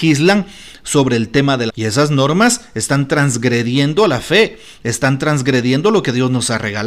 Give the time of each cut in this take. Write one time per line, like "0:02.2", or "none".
0:01.7